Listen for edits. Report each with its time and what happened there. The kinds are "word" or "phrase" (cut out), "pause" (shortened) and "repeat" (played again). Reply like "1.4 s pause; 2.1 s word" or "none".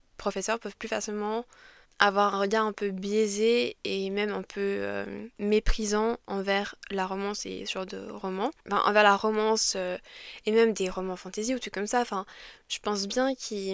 1.8 s pause